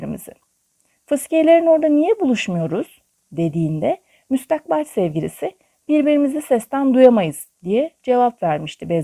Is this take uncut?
no; 1 cut; at 7.5 s

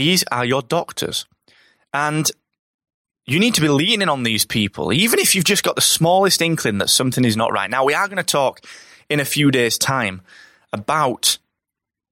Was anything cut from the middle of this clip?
no; 0 cuts

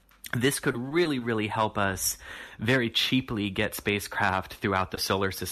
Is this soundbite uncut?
yes; 0 cuts

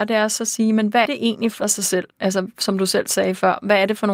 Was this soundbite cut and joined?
yes; 3 cuts; at 1.0 s, 1.6 s, 2.1 s

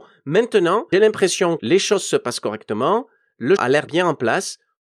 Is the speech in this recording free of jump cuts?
no; 4 cuts; at 0.9 s, 1.6 s, 3.6 s, 3.9 s

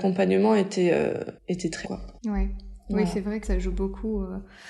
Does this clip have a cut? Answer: yes; 4 cuts; at 1.4 s, 1.8 s, 2.2 s, 3.4 s

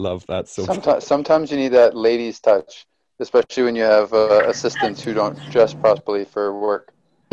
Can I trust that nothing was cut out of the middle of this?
yes; 0 cuts

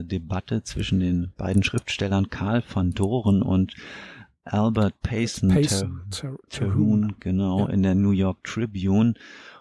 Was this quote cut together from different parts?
no; 0 cuts

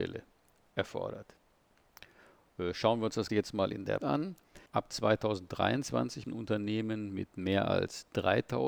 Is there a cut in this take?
yes; 4 cuts; at 3.3 s, 4.0 s, 4.7 s, 6.2 s

